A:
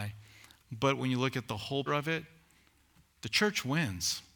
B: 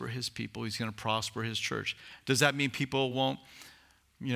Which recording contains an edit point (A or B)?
A